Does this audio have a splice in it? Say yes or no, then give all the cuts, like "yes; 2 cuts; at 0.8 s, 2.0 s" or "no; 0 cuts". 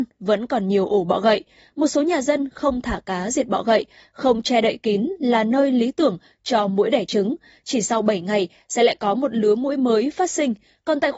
no; 0 cuts